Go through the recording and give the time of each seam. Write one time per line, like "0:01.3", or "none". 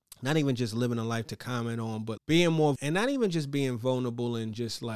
0:02.2
0:02.8